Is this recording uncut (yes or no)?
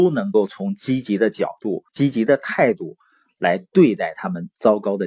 no